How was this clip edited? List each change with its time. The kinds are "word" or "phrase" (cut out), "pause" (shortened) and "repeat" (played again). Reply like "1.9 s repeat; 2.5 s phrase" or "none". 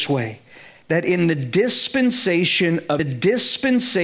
3.0 s repeat